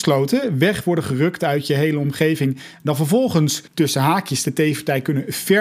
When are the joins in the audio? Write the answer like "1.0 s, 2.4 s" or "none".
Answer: 3.7 s